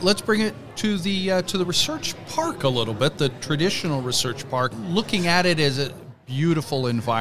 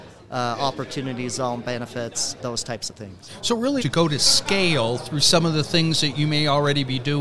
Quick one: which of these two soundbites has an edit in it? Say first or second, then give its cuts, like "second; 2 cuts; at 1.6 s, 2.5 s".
second; 2 cuts; at 2.4 s, 3.8 s